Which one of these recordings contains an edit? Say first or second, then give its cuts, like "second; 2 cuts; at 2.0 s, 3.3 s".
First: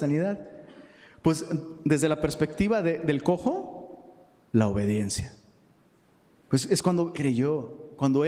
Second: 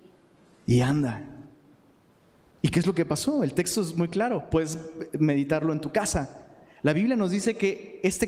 first; 1 cut; at 7.1 s